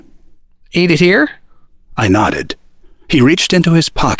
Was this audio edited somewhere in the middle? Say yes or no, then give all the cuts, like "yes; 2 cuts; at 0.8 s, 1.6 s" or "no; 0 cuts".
no; 0 cuts